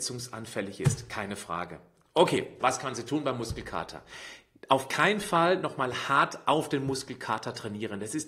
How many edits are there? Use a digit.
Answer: 1